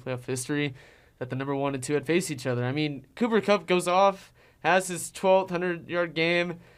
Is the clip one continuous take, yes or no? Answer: yes